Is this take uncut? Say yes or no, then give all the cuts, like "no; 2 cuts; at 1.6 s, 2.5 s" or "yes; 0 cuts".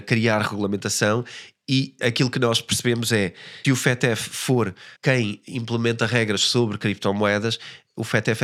no; 3 cuts; at 2.0 s, 3.6 s, 5.0 s